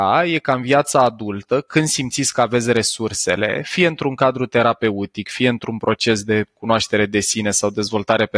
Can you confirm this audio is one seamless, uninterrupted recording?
yes; 0 cuts

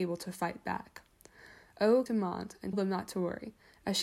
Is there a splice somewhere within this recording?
yes; 2 cuts; at 2.1 s, 2.7 s

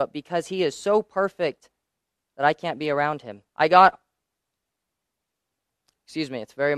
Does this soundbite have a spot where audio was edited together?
yes; 1 cut; at 3.5 s

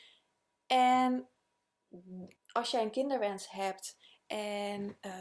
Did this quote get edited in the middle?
yes; 1 cut; at 2.4 s

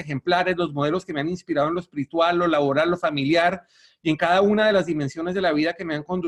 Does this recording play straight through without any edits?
yes; 0 cuts

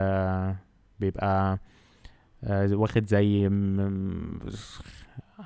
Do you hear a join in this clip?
yes; 1 cut; at 0.9 s

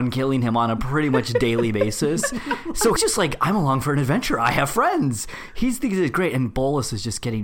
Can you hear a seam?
yes; 1 cut; at 3.0 s

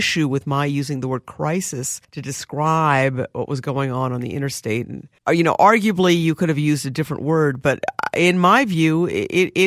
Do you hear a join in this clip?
yes; 2 cuts; at 2.0 s, 5.2 s

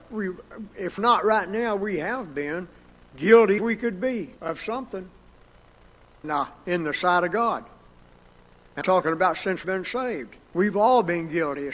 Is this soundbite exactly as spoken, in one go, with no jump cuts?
no; 7 cuts; at 1.0 s, 3.6 s, 4.4 s, 6.2 s, 8.8 s, 9.6 s, 10.4 s

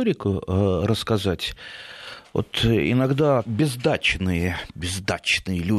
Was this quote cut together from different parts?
yes; 1 cut; at 3.4 s

